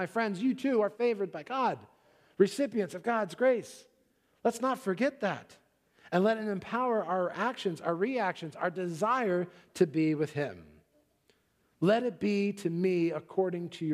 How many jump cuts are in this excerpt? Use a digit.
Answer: 0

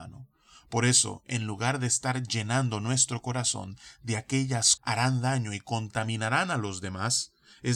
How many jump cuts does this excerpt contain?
1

